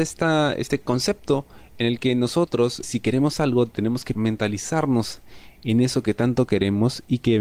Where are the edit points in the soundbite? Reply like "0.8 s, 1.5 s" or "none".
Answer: 2.8 s, 4.1 s